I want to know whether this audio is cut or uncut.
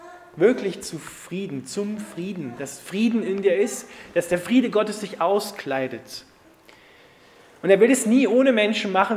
uncut